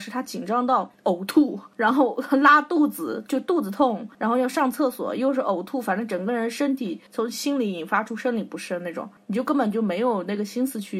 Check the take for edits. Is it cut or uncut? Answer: uncut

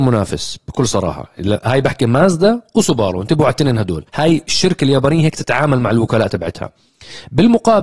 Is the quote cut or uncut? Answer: cut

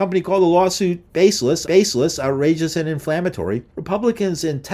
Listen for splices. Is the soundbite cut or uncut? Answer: cut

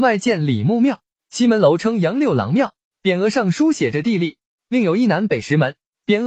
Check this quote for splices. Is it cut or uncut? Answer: uncut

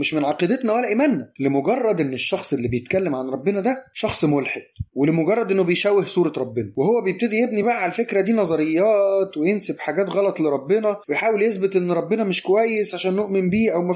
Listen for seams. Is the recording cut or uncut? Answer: uncut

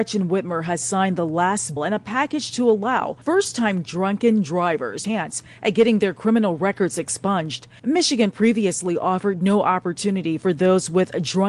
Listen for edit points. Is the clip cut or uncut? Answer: cut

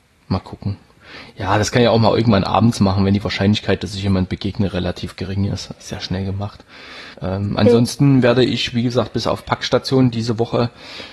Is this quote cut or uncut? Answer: cut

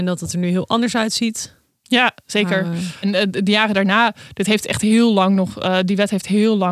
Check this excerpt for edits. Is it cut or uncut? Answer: cut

